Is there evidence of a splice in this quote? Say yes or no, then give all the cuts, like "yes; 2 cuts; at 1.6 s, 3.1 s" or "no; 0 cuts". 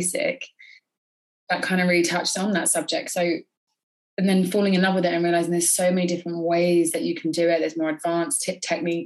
no; 0 cuts